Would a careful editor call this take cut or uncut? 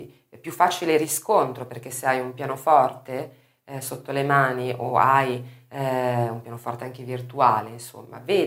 uncut